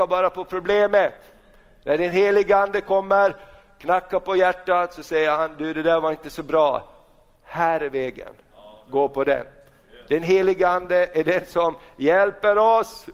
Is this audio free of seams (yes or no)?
yes